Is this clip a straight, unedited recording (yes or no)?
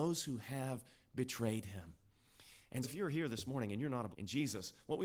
no